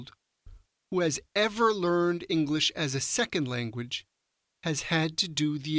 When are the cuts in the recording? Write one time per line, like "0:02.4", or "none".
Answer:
none